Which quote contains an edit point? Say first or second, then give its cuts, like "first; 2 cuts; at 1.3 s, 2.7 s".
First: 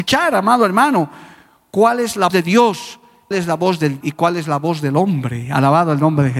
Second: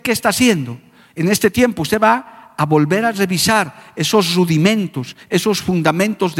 first; 3 cuts; at 2.3 s, 3.3 s, 4.0 s